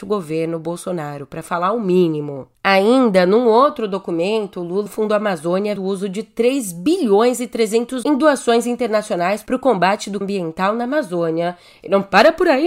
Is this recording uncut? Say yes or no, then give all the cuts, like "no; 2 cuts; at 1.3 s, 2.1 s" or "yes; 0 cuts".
no; 4 cuts; at 4.9 s, 5.8 s, 8.0 s, 10.2 s